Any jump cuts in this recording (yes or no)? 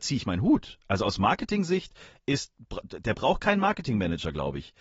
no